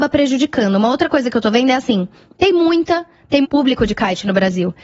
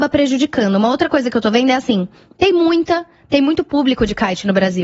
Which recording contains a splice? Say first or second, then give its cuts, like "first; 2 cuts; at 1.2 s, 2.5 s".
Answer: first; 1 cut; at 3.4 s